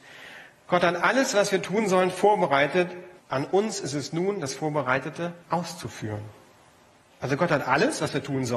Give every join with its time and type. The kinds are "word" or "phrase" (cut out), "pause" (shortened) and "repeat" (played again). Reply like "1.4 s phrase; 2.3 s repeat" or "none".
3.2 s pause; 5.4 s pause